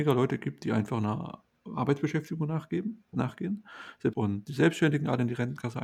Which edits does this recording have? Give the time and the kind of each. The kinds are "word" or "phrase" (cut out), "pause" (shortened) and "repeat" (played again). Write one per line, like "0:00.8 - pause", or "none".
0:04.1 - phrase

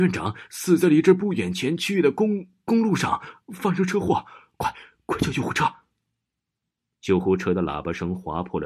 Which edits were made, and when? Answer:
none

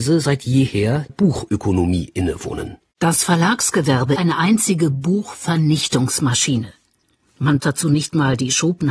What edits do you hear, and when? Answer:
0:01.1 - word
0:04.2 - word
0:07.6 - word

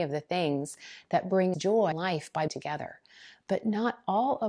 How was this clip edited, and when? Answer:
0:01.5 - word
0:01.9 - word
0:02.5 - word

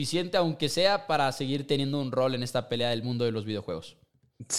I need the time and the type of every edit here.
none

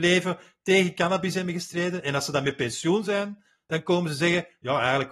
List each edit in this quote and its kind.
none

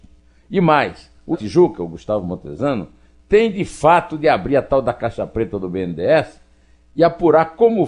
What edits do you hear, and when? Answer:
0:01.3 - phrase

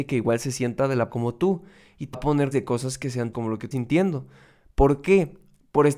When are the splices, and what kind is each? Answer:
0:01.1 - word
0:02.1 - word
0:02.5 - word
0:03.3 - word
0:03.7 - word

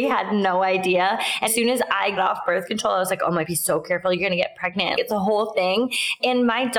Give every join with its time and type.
0:01.5 - word
0:02.2 - word
0:03.4 - word
0:05.0 - word

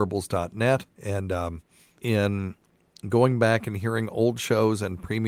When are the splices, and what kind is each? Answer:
0:00.9 - pause
0:02.0 - phrase

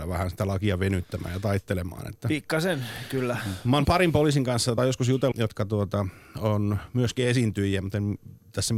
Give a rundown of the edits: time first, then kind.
0:03.8 - word
0:04.8 - word
0:05.3 - word

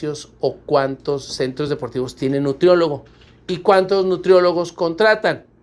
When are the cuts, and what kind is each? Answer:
none

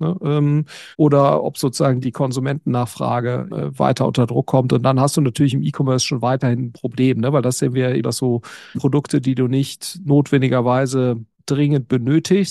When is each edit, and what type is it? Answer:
0:00.9 - pause
0:02.0 - word
0:03.5 - word
0:08.0 - word
0:08.7 - word
0:11.3 - pause

